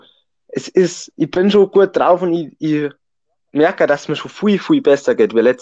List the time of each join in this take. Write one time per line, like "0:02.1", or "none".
none